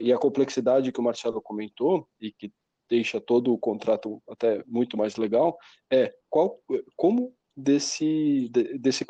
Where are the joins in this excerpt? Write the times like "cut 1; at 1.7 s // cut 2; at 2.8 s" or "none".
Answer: cut 1; at 2.3 s // cut 2; at 6.2 s // cut 3; at 7.4 s